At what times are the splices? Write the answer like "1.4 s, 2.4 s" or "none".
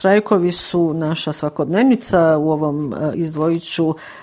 3.1 s